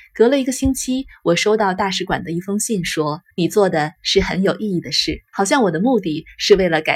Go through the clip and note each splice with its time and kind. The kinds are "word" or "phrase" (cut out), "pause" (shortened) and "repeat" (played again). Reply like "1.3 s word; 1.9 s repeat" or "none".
3.3 s pause; 5.3 s pause